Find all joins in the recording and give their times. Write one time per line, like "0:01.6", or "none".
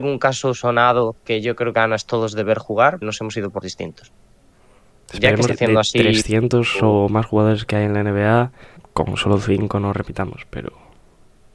0:01.2
0:01.7
0:03.0
0:03.6
0:05.5
0:08.8